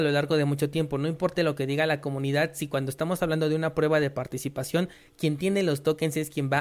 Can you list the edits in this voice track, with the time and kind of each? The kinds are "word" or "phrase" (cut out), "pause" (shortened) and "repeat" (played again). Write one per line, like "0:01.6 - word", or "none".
0:01.4 - word